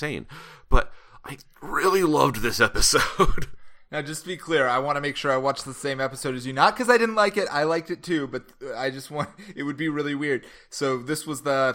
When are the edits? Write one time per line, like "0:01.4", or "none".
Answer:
none